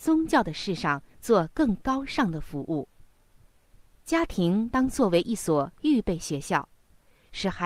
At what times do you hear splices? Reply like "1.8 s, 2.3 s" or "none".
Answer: none